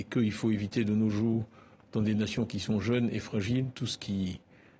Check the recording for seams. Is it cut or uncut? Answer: uncut